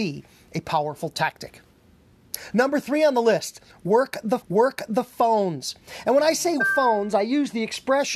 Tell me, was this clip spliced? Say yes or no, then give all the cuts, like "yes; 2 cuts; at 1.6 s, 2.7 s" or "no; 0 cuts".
yes; 2 cuts; at 4.4 s, 6.6 s